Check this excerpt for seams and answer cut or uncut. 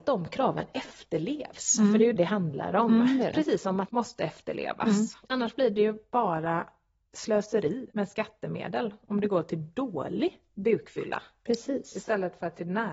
cut